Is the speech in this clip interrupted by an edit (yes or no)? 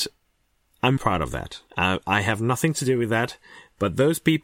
yes